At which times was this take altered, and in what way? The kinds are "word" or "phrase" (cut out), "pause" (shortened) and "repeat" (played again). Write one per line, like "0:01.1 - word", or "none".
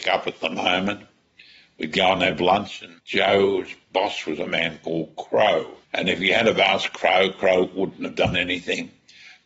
0:05.8 - pause